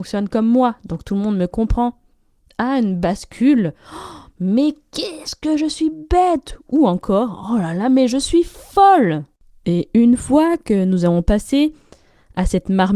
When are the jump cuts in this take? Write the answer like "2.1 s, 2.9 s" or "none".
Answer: none